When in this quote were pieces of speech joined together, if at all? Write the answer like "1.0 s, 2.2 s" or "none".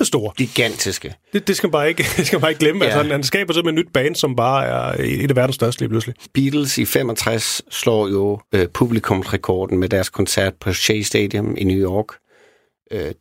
8.4 s